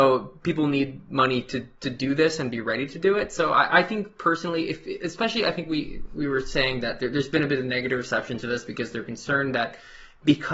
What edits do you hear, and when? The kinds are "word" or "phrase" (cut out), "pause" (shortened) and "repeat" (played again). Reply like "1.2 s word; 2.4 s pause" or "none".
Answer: none